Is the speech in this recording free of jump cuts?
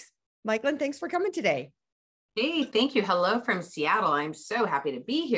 yes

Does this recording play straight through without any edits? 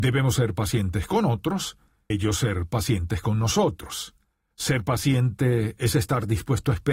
no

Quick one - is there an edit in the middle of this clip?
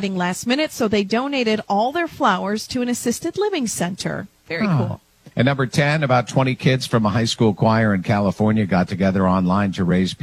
yes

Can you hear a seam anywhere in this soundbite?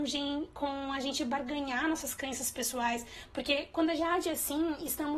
yes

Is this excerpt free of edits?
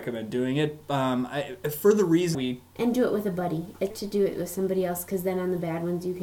no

